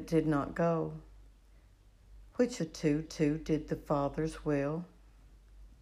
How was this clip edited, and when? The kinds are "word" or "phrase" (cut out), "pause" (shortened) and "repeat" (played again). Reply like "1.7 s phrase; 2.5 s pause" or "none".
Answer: 2.6 s word; 3.0 s repeat